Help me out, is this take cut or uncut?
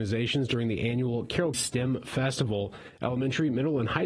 cut